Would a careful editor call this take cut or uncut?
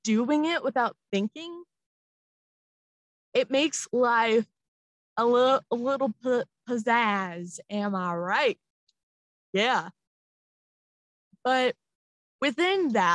uncut